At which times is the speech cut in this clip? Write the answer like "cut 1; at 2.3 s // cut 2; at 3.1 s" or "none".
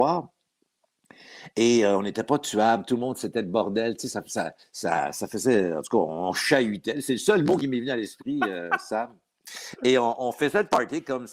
cut 1; at 4.6 s